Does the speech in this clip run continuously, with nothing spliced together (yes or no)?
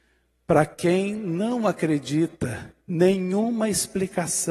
no